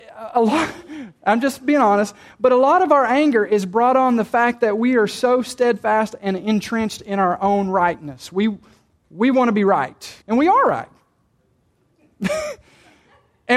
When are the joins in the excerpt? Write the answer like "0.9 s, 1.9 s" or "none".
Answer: 10.2 s